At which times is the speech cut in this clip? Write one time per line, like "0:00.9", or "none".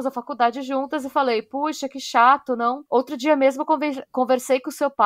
0:02.9